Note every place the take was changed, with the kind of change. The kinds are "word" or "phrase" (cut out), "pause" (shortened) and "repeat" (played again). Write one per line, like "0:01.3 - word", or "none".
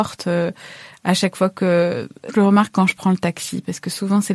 0:02.3 - word